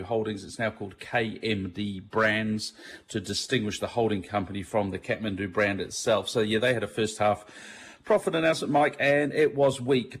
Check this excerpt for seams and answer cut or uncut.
uncut